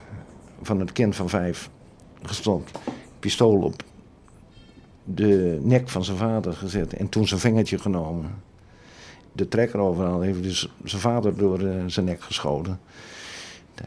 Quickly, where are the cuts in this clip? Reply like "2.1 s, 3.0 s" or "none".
none